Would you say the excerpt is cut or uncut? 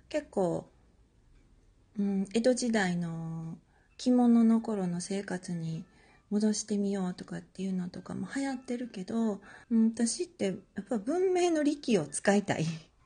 cut